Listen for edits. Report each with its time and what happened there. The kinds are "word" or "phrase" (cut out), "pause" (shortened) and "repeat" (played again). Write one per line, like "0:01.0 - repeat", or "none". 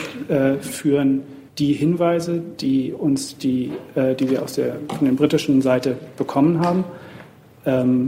0:01.5 - pause